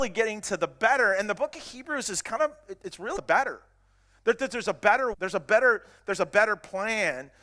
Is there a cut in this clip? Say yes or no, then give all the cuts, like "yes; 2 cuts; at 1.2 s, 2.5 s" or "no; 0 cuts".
yes; 2 cuts; at 3.2 s, 5.1 s